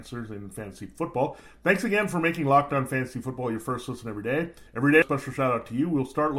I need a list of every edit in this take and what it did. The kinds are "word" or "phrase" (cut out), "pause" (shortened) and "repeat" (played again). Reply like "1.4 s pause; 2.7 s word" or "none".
4.7 s pause; 5.0 s word